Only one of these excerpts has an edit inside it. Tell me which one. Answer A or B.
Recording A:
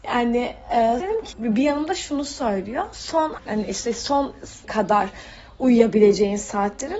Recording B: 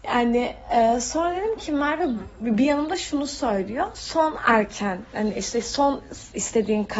A